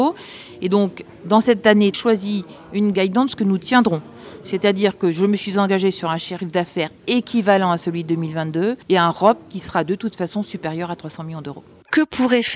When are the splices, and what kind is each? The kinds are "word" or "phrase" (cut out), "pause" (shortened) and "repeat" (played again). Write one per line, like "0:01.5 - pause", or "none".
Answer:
0:01.9 - phrase
0:02.9 - phrase
0:08.8 - pause